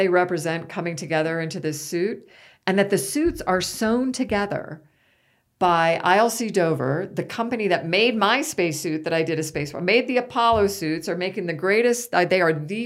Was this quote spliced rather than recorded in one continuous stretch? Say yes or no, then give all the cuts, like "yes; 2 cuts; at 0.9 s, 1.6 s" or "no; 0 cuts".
no; 0 cuts